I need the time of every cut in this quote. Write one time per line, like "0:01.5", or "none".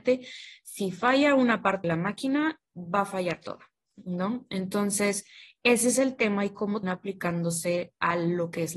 0:01.8
0:06.8